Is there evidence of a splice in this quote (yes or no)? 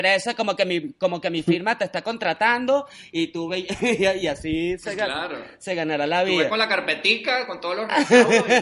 no